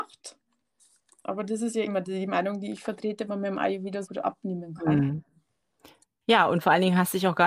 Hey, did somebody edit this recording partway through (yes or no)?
yes